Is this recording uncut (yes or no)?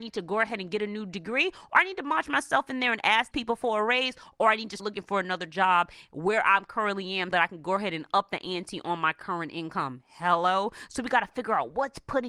no